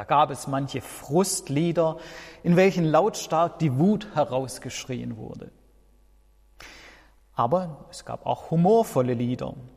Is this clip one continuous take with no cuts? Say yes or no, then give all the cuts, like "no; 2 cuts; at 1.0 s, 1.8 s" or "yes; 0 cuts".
yes; 0 cuts